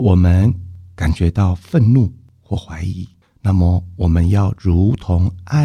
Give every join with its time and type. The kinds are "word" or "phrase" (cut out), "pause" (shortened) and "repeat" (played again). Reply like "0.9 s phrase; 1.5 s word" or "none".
none